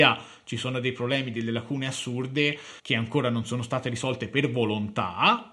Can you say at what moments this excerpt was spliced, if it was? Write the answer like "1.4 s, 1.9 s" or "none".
2.8 s